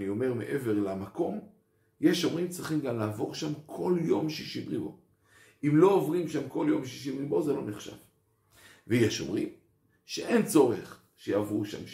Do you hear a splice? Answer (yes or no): no